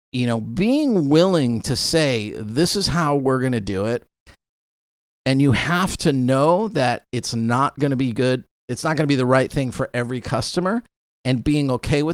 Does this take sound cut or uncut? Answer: uncut